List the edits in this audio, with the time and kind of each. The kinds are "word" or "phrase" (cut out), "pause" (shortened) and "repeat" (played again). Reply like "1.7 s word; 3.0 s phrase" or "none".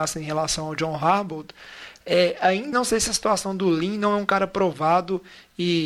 2.7 s word